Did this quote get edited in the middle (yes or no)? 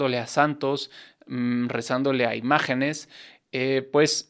no